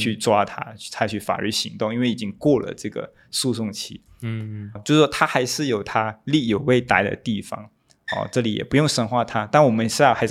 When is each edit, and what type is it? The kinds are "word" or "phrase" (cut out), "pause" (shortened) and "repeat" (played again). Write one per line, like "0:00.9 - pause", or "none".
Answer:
0:04.8 - word

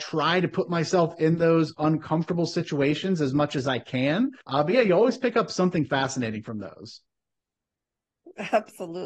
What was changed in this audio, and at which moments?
0:04.4 - pause

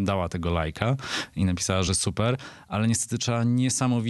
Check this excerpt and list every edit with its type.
none

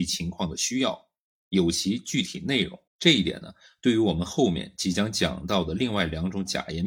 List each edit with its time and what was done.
0:02.9 - pause

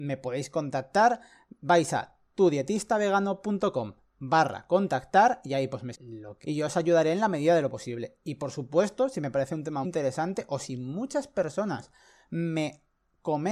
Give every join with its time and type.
0:05.9 - word
0:06.4 - word
0:09.8 - word

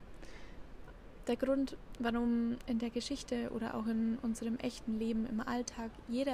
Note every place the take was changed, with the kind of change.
none

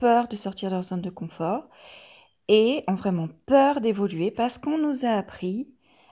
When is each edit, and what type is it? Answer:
none

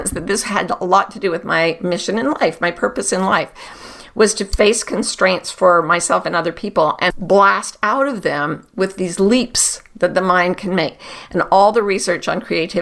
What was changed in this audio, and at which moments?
0:07.1 - word

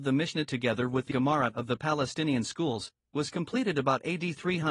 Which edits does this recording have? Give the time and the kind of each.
0:01.1 - word

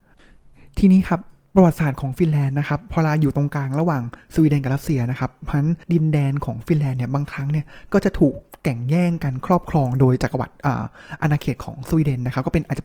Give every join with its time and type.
0:05.8 - pause

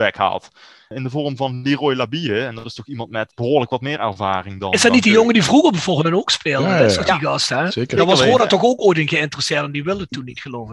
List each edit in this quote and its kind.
0:03.3 - word

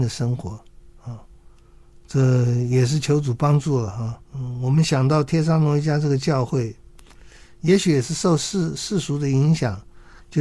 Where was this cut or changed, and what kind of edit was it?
0:04.2 - pause

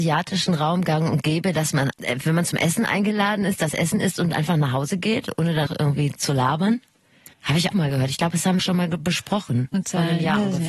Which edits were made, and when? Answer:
0:01.9 - word
0:05.7 - word
0:07.3 - pause
0:07.7 - word
0:08.6 - phrase
0:09.7 - word

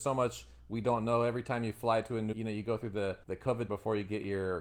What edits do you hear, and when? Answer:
0:02.3 - word
0:03.2 - pause
0:03.7 - word

